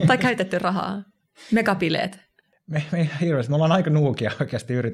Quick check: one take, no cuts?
yes; 0 cuts

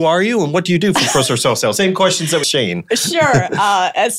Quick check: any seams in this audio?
yes; 1 cut; at 2.4 s

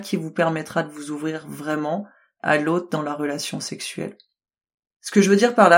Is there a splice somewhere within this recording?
no; 0 cuts

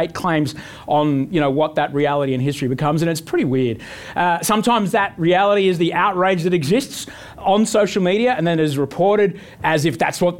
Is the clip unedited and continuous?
yes; 0 cuts

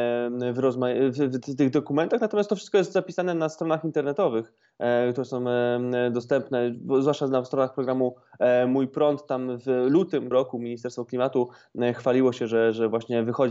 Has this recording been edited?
yes; 1 cut; at 10.3 s

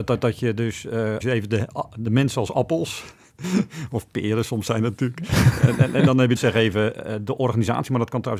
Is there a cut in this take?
yes; 2 cuts; at 1.2 s, 6.4 s

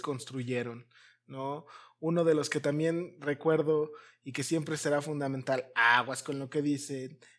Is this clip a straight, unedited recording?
yes; 0 cuts

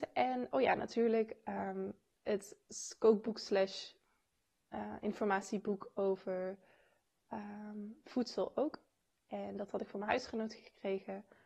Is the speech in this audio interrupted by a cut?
no; 0 cuts

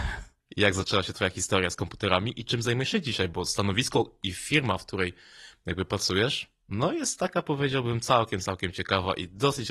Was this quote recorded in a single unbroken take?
yes; 0 cuts

